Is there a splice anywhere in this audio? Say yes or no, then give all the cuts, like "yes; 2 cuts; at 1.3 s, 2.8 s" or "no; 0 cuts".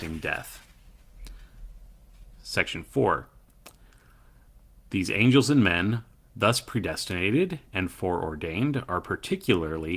no; 0 cuts